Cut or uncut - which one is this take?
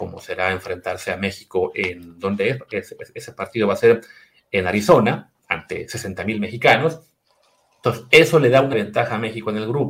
cut